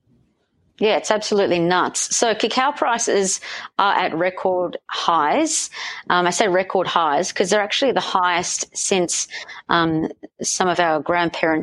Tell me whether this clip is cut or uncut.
uncut